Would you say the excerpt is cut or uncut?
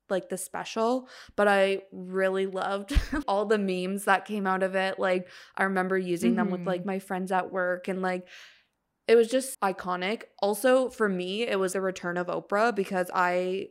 cut